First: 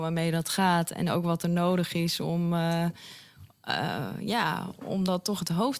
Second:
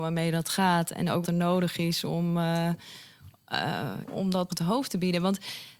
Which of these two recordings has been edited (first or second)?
second